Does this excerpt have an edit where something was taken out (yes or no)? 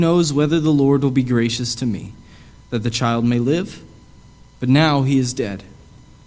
no